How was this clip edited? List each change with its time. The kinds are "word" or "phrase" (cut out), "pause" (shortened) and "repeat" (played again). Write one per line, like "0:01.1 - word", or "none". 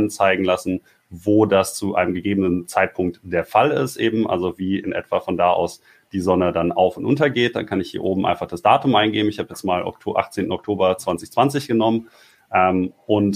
none